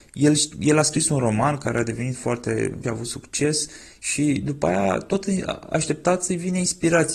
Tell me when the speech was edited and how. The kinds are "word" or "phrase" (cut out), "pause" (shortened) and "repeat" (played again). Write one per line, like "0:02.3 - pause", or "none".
0:02.8 - phrase